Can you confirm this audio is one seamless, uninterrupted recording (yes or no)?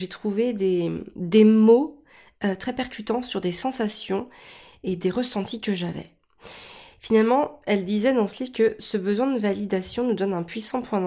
yes